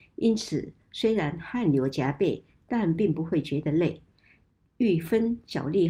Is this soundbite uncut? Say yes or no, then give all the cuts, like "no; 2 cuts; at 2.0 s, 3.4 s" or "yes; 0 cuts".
yes; 0 cuts